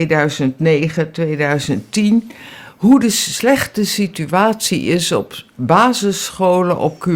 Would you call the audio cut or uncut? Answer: uncut